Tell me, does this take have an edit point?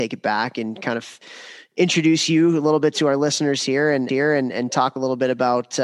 yes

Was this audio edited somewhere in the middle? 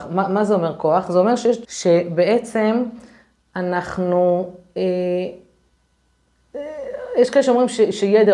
yes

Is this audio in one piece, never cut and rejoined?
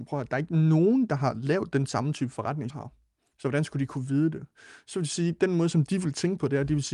no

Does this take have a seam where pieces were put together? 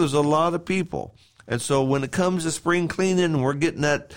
no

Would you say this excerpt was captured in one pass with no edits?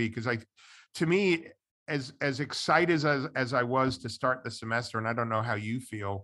yes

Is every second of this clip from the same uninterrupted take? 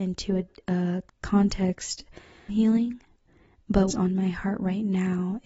no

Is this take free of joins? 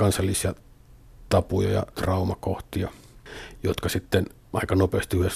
yes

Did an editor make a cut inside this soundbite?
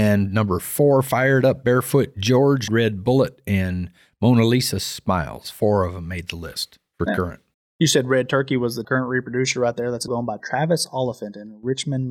yes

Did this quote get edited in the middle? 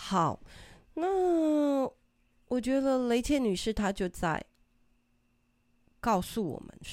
no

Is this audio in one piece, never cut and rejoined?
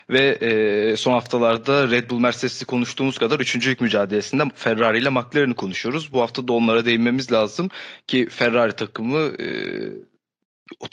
yes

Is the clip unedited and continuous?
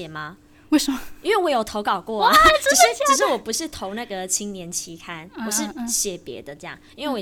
yes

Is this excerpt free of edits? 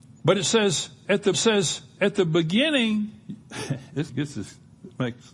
no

